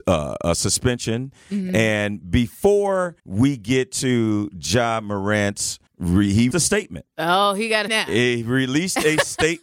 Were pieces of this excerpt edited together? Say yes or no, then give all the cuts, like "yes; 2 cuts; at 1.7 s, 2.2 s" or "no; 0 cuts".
yes; 4 cuts; at 3.2 s, 5.9 s, 6.5 s, 7.9 s